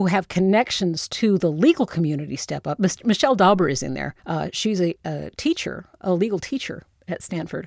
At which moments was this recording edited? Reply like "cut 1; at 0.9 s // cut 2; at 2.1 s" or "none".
cut 1; at 4.2 s // cut 2; at 5.9 s